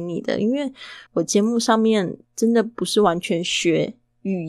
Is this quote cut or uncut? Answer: cut